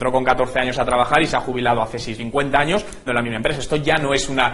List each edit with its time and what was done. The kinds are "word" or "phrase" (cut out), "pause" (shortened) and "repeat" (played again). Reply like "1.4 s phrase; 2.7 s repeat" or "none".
2.2 s word; 3.1 s word